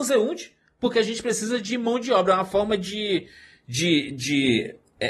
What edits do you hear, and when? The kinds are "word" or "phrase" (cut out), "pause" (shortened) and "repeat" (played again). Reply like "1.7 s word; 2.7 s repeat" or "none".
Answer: none